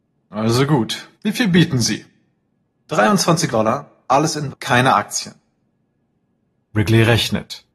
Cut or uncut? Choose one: cut